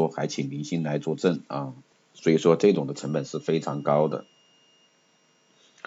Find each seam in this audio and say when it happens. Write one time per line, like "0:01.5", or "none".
0:01.9